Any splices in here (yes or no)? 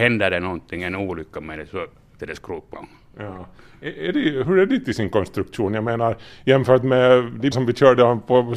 yes